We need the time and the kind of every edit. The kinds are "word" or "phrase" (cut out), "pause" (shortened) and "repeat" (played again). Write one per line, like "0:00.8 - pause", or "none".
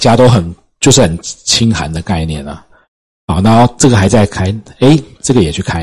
none